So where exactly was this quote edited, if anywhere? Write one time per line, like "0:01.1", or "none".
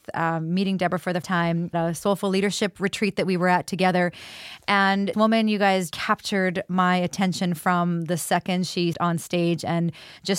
0:01.2
0:01.7
0:05.1
0:05.9
0:08.9